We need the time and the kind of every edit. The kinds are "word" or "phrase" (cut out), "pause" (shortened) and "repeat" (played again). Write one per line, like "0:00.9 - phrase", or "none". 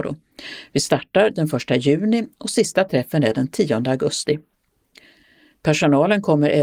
none